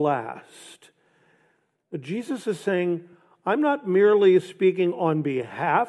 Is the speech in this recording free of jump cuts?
yes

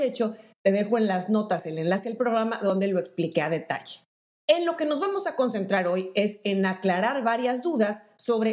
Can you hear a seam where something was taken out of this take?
no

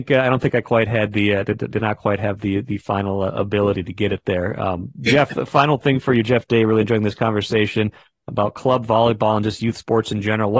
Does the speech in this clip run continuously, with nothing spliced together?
yes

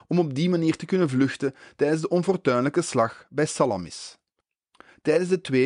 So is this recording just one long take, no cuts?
yes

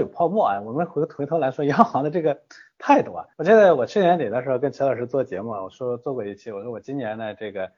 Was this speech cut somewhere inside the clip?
yes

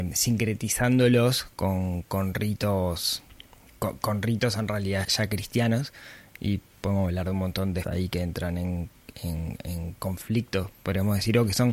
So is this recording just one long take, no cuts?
no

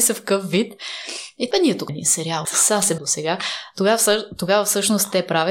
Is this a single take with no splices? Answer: no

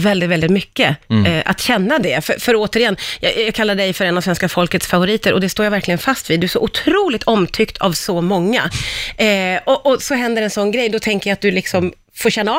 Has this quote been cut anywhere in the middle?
no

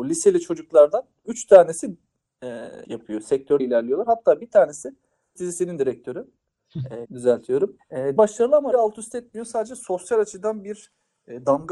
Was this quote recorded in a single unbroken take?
no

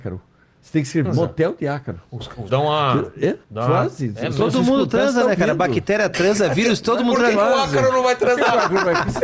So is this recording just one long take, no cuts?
no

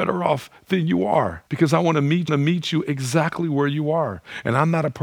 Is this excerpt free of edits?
no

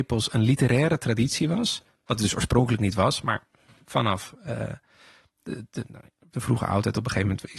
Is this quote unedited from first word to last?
yes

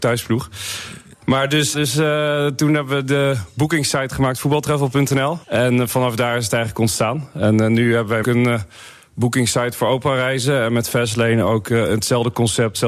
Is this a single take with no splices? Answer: no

